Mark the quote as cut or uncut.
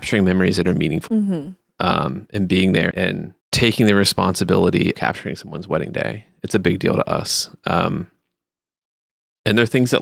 cut